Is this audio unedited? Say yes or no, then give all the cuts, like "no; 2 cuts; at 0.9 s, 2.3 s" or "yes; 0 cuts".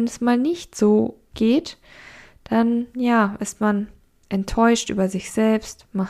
yes; 0 cuts